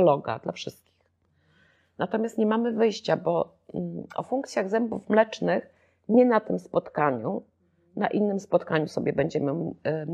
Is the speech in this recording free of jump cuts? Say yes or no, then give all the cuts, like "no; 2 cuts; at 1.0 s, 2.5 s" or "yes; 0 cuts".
yes; 0 cuts